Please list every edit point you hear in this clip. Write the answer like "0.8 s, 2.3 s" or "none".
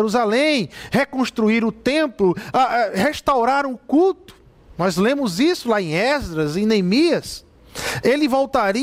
none